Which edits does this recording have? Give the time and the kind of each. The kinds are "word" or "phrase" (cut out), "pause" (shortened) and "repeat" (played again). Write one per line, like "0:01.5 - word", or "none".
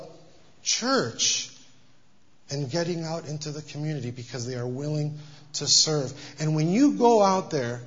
none